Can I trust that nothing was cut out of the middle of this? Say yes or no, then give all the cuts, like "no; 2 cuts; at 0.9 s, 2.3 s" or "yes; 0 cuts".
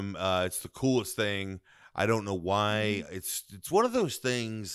yes; 0 cuts